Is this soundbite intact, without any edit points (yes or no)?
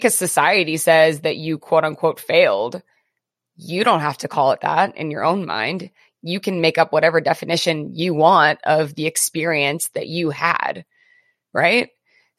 yes